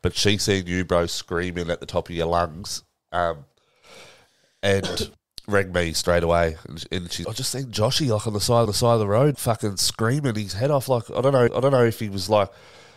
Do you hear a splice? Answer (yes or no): yes